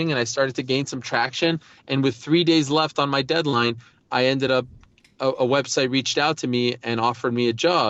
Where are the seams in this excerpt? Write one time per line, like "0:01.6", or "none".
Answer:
none